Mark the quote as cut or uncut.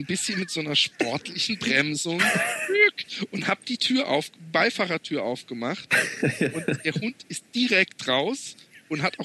uncut